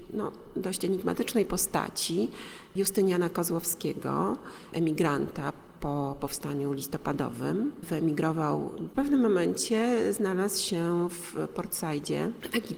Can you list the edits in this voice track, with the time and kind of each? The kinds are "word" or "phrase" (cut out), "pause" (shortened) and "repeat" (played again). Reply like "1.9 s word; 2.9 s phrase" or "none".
4.7 s word; 7.8 s word; 8.9 s phrase

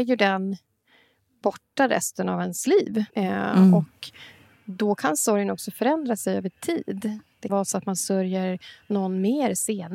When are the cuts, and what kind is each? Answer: 3.1 s pause; 7.5 s word

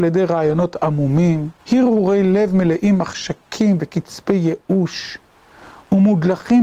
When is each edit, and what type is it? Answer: 1.6 s pause

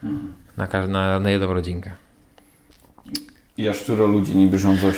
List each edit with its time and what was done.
none

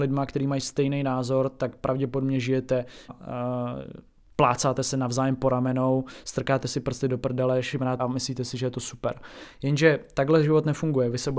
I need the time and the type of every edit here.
3.1 s phrase; 8.0 s phrase

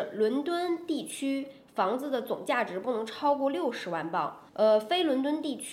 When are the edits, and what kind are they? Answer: 4.5 s pause

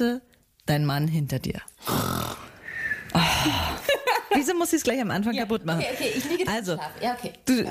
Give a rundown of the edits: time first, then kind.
none

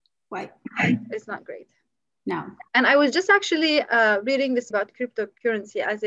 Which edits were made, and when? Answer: 2.7 s pause; 4.7 s word

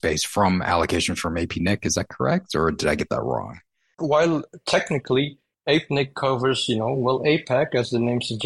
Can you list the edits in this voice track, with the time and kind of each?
none

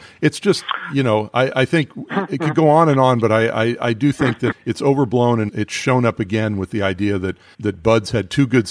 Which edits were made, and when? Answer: 4.5 s word; 5.5 s word; 7.5 s word

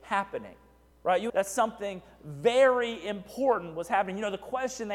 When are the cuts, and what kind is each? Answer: 0.9 s pause; 1.3 s phrase

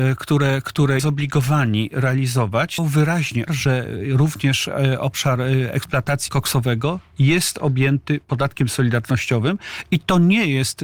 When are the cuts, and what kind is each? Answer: 1.0 s word; 2.8 s word; 3.5 s word; 6.3 s word

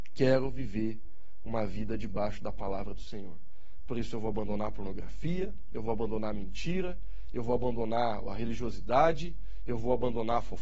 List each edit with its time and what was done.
none

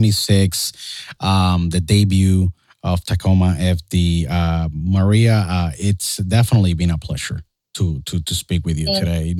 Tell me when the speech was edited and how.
none

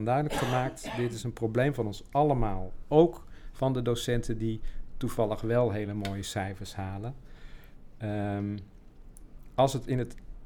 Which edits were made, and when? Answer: none

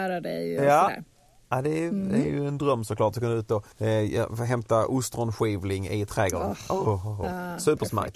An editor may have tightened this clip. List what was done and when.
3.7 s pause

